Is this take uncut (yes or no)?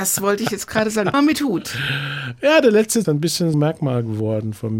no